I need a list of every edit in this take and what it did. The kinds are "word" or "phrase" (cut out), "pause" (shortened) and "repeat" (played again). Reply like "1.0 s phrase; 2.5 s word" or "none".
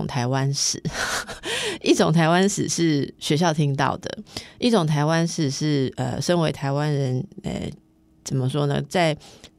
none